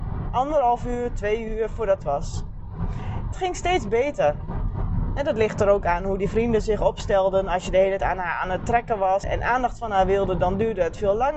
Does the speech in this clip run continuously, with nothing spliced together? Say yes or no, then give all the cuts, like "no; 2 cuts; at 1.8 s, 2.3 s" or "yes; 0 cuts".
no; 4 cuts; at 2.0 s, 3.3 s, 8.0 s, 9.2 s